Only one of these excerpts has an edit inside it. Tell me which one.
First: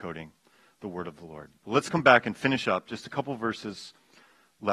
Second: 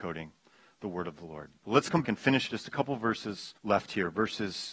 second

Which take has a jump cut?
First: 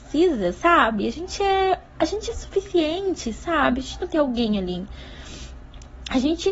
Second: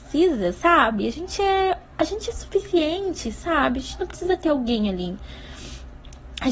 first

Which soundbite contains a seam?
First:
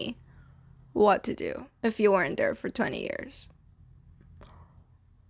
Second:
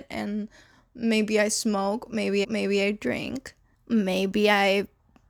second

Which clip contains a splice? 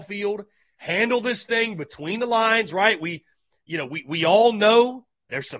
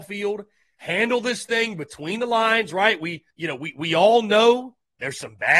second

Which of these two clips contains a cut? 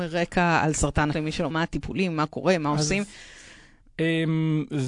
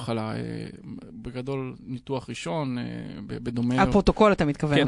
first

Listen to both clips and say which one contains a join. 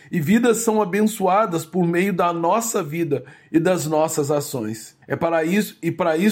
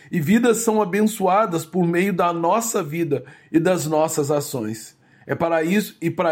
first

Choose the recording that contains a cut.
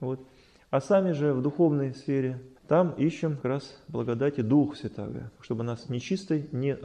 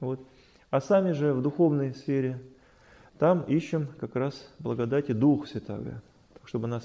first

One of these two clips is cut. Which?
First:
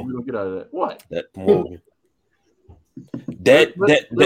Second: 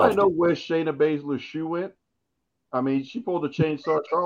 first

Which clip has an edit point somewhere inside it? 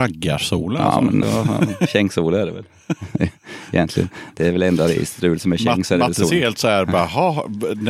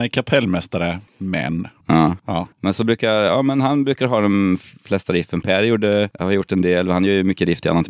first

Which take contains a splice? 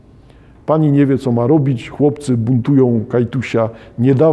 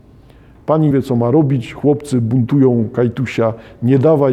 second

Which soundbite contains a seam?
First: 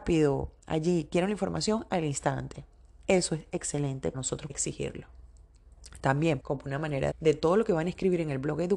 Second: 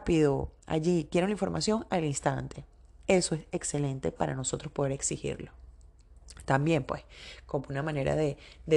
first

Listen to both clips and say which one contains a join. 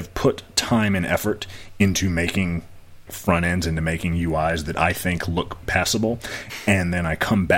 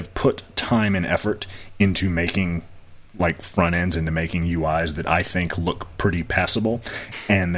first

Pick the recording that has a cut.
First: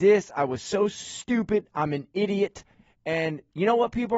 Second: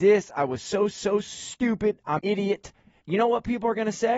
second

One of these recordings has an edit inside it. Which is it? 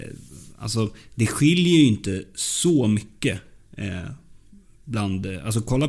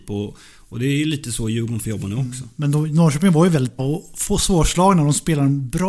second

